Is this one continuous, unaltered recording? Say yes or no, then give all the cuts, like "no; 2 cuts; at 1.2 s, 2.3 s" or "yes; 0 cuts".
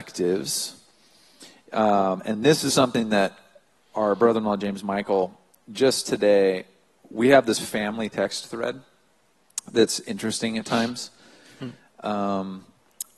yes; 0 cuts